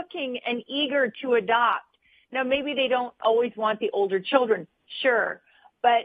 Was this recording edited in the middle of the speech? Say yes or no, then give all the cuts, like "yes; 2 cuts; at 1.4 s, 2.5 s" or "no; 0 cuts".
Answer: no; 0 cuts